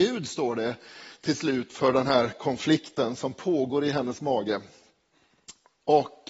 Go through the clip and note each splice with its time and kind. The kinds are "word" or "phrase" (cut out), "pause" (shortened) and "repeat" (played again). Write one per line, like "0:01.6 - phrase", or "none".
none